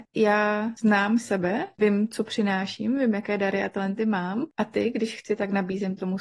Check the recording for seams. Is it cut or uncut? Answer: uncut